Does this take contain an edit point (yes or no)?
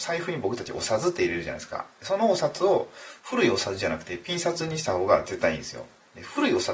yes